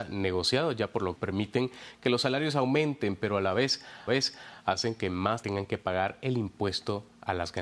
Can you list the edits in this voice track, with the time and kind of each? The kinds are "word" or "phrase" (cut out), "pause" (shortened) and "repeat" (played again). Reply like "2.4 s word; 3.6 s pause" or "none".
1.1 s word; 4.1 s repeat; 5.4 s word